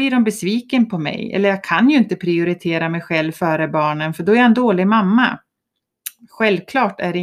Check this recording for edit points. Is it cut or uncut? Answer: uncut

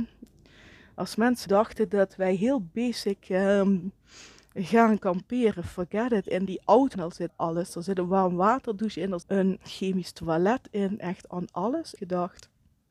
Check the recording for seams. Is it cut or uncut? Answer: cut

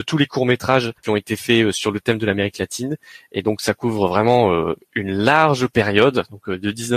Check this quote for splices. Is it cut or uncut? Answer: cut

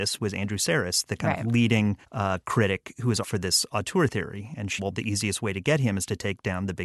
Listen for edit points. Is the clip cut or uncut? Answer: cut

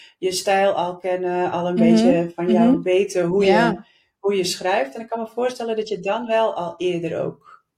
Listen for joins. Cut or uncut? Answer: uncut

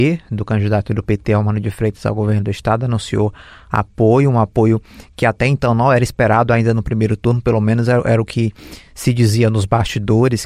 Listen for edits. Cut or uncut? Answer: uncut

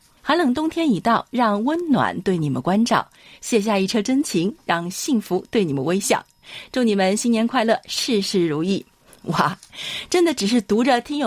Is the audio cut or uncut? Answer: uncut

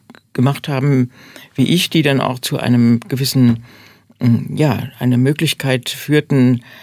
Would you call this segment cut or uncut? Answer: uncut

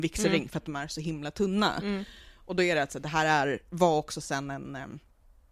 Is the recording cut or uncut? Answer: uncut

